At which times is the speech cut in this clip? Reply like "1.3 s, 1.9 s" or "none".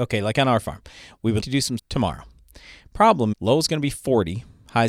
1.4 s, 1.8 s, 3.3 s